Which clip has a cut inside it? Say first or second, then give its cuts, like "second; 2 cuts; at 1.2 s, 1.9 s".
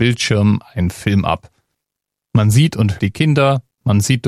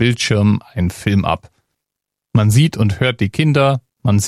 first; 1 cut; at 3.0 s